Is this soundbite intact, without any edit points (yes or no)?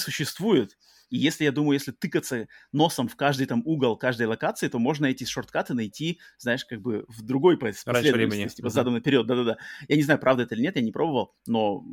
yes